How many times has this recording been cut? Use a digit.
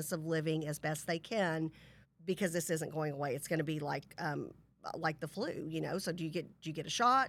1